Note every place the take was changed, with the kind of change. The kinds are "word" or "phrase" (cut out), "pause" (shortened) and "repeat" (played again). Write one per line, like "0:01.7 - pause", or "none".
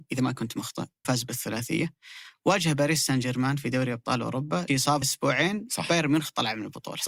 0:01.0 - phrase
0:04.7 - word
0:05.0 - word